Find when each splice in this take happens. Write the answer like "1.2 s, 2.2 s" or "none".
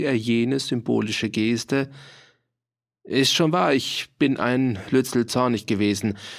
none